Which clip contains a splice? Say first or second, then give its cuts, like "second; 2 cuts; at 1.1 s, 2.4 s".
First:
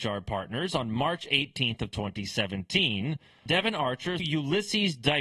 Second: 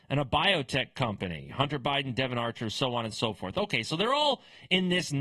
first; 2 cuts; at 3.5 s, 4.2 s